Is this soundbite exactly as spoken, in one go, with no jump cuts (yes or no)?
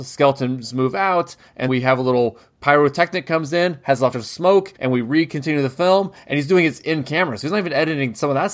no